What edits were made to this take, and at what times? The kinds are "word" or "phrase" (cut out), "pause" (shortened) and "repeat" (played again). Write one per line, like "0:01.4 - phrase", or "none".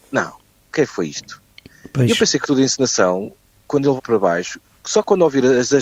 0:02.4 - word
0:04.0 - word